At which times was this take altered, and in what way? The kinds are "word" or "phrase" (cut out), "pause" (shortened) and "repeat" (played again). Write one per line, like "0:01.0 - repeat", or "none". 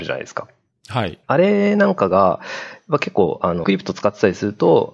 0:01.2 - pause
0:03.6 - word

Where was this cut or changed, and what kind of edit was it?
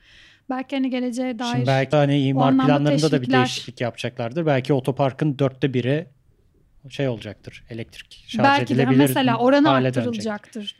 0:01.9 - word

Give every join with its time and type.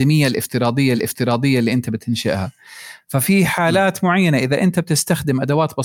0:00.9 - repeat

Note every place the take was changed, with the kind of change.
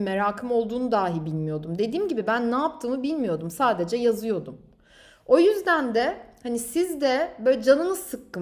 none

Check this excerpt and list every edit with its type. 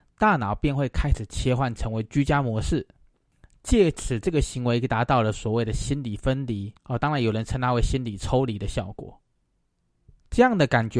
0:06.8 - pause

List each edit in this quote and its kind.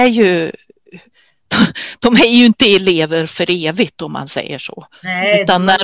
none

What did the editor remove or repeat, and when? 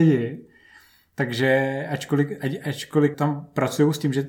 0:03.1 - word

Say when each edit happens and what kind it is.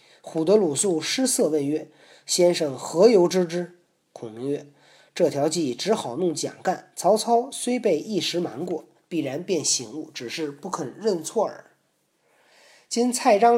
none

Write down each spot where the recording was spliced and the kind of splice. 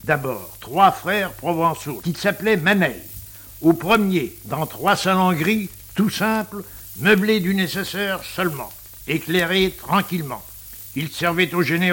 0:02.0 - word

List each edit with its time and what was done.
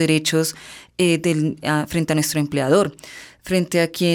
none

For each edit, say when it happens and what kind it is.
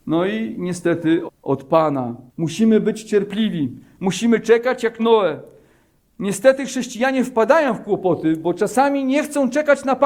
0:01.3 - word
0:02.3 - pause
0:05.0 - word

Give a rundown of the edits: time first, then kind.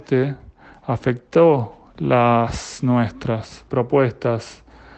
0:03.7 - word

